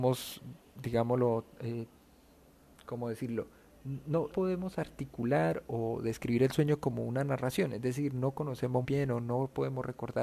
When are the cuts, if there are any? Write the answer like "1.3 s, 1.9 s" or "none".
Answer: 4.3 s, 5.7 s, 8.8 s